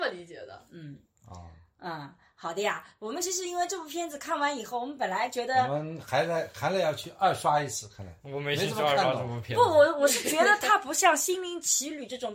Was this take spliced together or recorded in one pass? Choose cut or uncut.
uncut